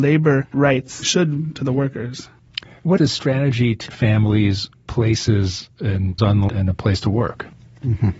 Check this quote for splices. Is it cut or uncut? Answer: cut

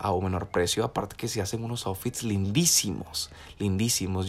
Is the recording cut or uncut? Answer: uncut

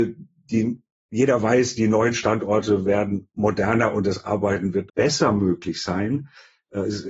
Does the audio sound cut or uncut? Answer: cut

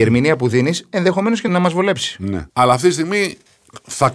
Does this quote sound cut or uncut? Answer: cut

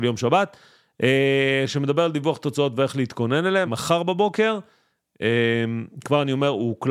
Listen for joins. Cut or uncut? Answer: cut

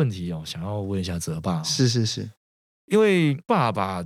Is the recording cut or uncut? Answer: uncut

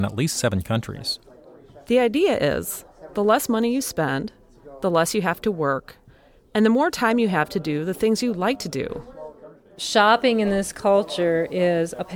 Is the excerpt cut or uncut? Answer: uncut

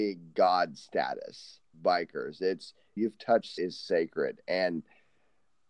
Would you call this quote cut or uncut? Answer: cut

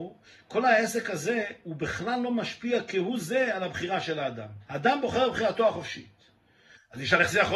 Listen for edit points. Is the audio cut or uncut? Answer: cut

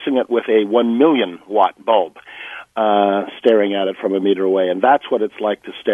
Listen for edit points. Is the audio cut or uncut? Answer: uncut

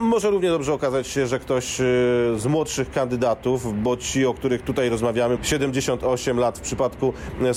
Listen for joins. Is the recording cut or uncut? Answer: cut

